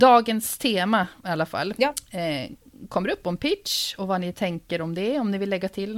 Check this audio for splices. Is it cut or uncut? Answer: uncut